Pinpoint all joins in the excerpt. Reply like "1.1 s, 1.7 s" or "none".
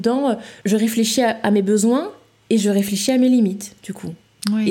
none